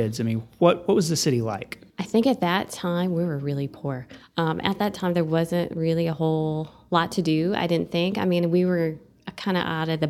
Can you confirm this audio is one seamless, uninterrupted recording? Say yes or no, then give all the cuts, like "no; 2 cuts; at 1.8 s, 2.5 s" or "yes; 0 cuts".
no; 1 cut; at 1.9 s